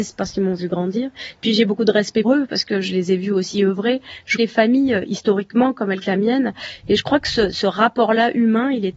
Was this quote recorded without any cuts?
no; 4 cuts; at 2.2 s, 4.4 s, 6.0 s, 7.5 s

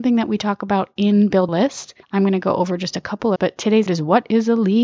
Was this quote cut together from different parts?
yes; 4 cuts; at 1.5 s, 2.0 s, 3.4 s, 3.9 s

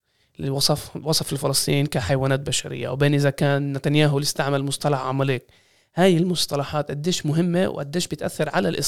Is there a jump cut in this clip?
no; 0 cuts

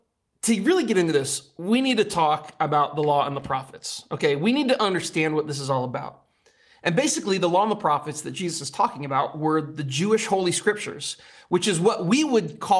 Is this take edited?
no; 0 cuts

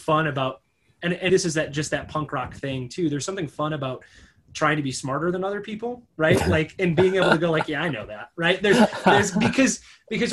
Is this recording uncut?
no; 1 cut; at 1.3 s

